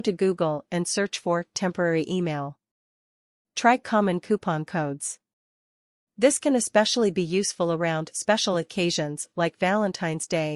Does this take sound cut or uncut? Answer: uncut